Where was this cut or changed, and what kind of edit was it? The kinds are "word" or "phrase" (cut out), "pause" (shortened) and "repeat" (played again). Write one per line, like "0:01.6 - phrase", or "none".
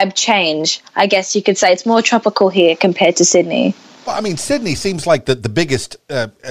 none